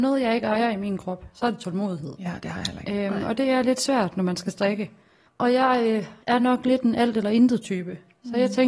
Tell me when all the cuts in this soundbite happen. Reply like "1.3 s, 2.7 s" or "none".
5.2 s, 6.2 s